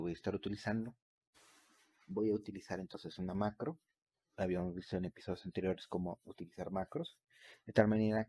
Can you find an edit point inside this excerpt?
no; 0 cuts

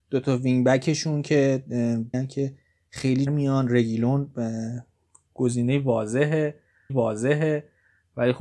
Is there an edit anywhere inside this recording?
yes; 3 cuts; at 2.1 s, 3.3 s, 6.9 s

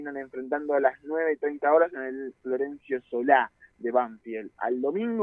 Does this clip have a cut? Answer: no; 0 cuts

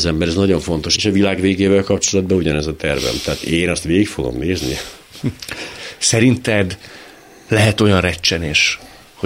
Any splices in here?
no; 0 cuts

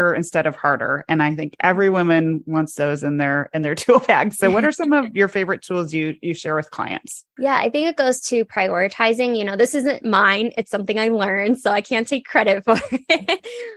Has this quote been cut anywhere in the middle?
yes; 1 cut; at 7.3 s

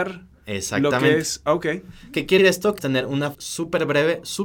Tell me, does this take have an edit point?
yes; 3 cuts; at 2.4 s, 2.8 s, 3.3 s

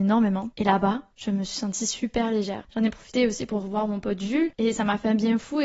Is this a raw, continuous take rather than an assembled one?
yes; 0 cuts

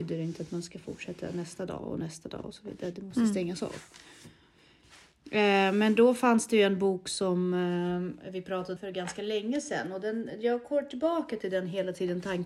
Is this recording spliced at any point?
yes; 1 cut; at 8.8 s

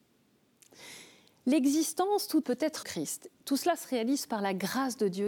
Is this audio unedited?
no; 3 cuts; at 2.4 s, 2.8 s, 3.3 s

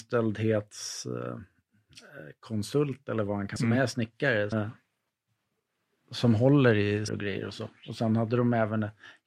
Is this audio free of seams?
no; 3 cuts; at 3.6 s, 4.5 s, 7.1 s

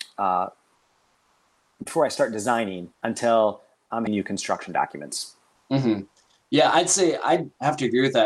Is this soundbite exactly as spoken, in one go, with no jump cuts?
no; 2 cuts; at 2.9 s, 4.1 s

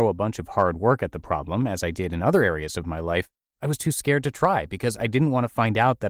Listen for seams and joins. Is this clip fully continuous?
no; 1 cut; at 3.4 s

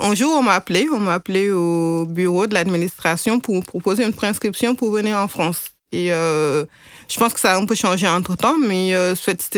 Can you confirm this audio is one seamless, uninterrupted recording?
yes; 0 cuts

